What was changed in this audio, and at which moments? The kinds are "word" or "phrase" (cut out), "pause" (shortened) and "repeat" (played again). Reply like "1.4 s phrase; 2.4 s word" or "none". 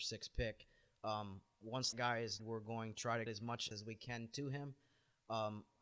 1.9 s word; 2.4 s word; 2.9 s word; 3.3 s word; 3.7 s word